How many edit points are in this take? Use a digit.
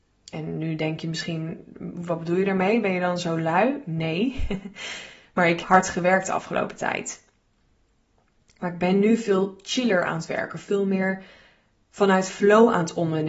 1